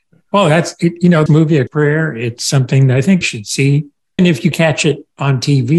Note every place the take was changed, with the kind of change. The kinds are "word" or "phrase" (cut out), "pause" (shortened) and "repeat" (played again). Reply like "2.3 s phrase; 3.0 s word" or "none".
1.3 s word; 1.7 s word; 2.4 s word; 3.2 s word; 4.2 s word; 4.5 s word